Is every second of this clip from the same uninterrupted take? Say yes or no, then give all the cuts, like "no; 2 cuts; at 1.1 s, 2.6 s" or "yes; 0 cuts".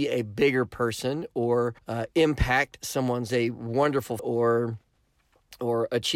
no; 3 cuts; at 1.8 s, 3.3 s, 4.2 s